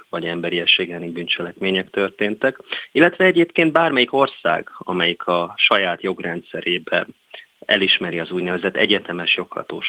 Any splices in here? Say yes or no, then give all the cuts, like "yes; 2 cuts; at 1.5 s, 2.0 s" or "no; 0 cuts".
no; 0 cuts